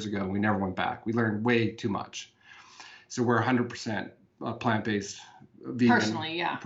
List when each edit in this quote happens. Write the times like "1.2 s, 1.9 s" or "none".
none